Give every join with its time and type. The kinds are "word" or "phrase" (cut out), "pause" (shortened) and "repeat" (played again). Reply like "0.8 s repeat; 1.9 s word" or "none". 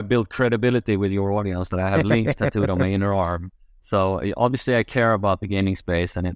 none